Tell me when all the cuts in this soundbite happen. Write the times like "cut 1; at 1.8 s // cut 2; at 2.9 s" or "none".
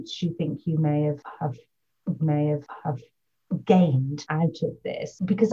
cut 1; at 2.2 s